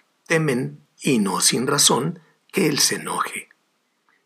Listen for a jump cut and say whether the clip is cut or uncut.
uncut